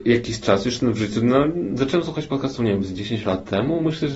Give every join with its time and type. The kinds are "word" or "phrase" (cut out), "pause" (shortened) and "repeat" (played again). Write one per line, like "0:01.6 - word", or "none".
none